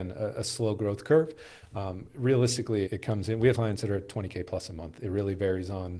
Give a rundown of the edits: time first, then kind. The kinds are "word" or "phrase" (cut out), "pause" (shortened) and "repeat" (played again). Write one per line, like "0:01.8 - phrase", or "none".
0:02.9 - word
0:03.5 - word